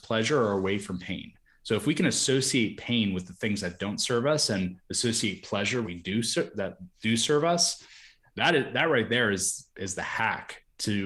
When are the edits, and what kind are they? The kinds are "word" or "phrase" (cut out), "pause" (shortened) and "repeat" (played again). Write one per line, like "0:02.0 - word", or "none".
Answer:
0:05.8 - phrase

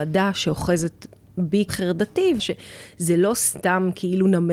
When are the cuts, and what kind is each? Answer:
0:01.7 - word
0:02.4 - phrase

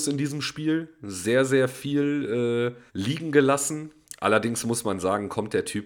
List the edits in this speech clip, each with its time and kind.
0:02.9 - pause

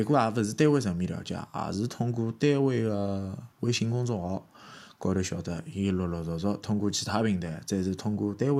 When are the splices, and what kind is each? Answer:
0:03.5 - pause

